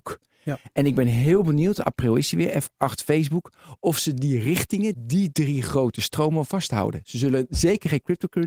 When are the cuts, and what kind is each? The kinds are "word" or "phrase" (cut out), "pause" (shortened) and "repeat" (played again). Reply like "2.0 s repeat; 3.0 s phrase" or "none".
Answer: 4.9 s word